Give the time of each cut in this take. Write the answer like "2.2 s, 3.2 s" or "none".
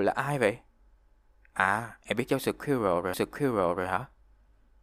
3.1 s

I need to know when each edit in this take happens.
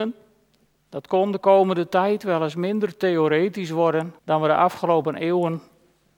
4.2 s

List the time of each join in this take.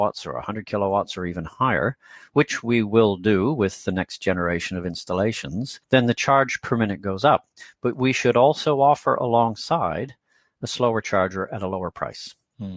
5.8 s

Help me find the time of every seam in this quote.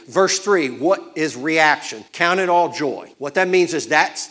2.1 s, 3.1 s

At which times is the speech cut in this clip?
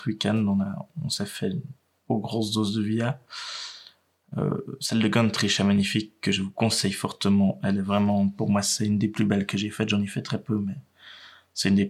none

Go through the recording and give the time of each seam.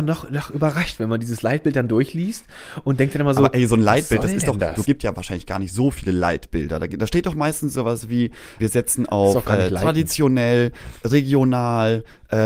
4.8 s, 8.6 s

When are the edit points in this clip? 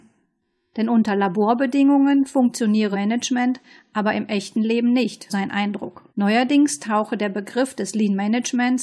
2.9 s, 5.3 s, 6.1 s

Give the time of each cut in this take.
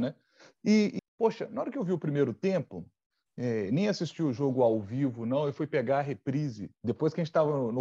1.0 s

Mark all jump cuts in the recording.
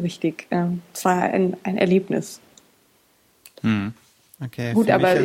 none

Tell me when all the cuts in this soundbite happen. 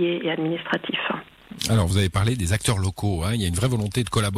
none

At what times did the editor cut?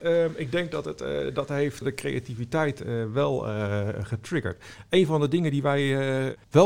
1.8 s

